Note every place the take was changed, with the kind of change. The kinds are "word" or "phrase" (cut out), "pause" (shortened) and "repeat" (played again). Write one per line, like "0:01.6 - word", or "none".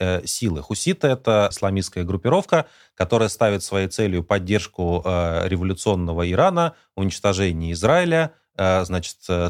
0:01.5 - word